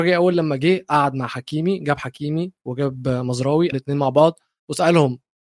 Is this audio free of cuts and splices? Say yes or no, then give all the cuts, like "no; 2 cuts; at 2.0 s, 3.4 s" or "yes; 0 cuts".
no; 1 cut; at 3.7 s